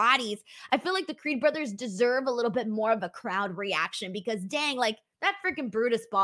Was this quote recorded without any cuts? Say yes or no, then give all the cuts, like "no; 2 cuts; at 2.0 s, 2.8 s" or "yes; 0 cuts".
yes; 0 cuts